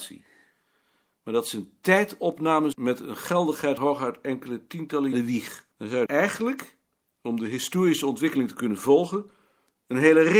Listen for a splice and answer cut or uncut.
cut